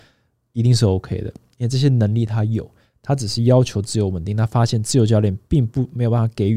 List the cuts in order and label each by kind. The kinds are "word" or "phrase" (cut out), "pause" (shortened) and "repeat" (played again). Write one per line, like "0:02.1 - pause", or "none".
none